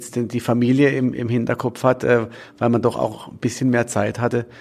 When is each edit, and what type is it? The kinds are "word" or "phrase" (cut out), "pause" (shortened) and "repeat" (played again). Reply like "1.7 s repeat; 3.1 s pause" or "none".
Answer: none